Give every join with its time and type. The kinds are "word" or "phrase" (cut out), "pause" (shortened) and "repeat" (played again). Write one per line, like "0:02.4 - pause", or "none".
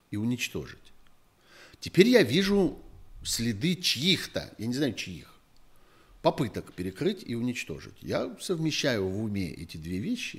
none

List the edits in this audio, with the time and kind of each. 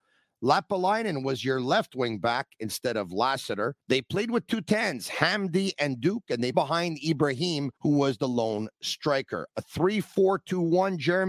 0:03.8 - pause
0:06.5 - phrase
0:07.8 - pause

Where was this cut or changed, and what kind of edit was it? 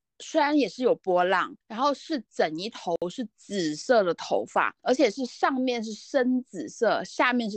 0:01.6 - pause
0:04.8 - pause

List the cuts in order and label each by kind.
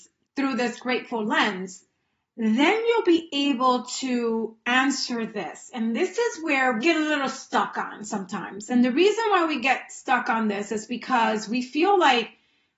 0:06.8 - phrase

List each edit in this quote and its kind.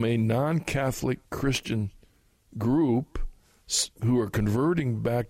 0:03.9 - pause

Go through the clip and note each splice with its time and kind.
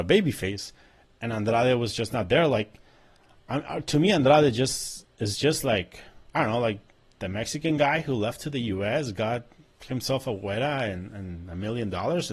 none

